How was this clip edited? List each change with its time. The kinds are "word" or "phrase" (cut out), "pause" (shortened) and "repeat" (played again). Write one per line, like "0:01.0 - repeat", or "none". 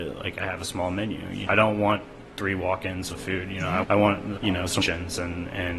0:01.5 - word
0:03.1 - word
0:03.8 - word
0:04.4 - word
0:04.8 - word